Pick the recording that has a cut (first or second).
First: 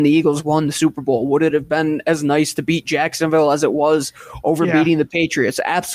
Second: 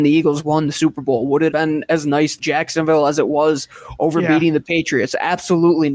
second